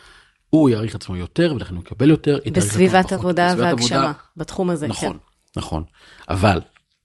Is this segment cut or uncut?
uncut